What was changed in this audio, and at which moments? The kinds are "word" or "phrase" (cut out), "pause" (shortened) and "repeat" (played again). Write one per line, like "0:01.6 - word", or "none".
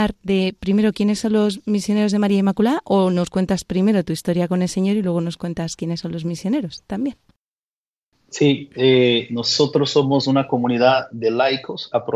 none

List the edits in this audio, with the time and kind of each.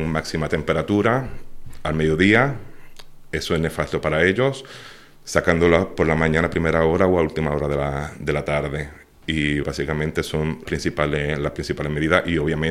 0:09.6 - word
0:10.7 - word

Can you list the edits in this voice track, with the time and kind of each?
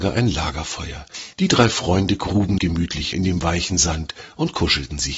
0:01.3 - pause
0:02.6 - word
0:03.1 - word

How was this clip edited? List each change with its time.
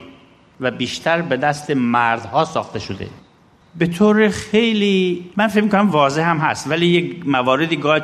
none

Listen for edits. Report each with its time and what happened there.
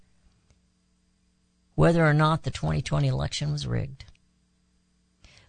none

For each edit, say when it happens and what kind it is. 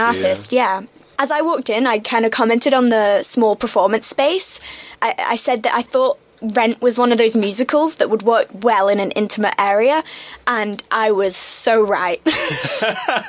none

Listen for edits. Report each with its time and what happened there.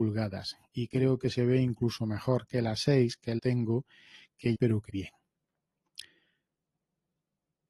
0:03.4 - phrase
0:04.5 - phrase
0:04.9 - word

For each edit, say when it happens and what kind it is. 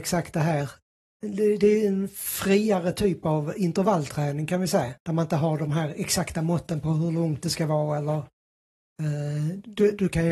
0:05.0 - pause

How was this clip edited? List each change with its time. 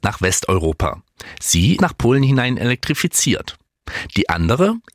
0:01.8 - phrase

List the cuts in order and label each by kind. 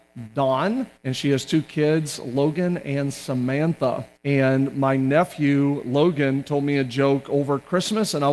0:01.0 - pause
0:04.2 - pause

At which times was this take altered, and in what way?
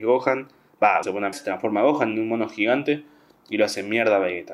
0:01.0 - word
0:01.3 - word

